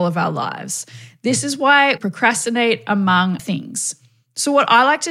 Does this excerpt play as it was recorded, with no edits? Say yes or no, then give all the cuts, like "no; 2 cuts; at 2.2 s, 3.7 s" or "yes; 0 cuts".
no; 2 cuts; at 2.0 s, 3.4 s